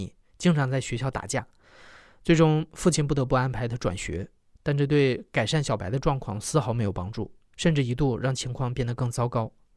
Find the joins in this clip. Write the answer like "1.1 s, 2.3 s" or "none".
none